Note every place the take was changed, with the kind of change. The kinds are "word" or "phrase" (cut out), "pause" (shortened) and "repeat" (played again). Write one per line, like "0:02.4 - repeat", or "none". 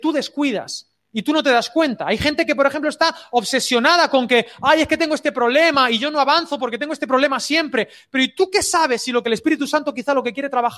none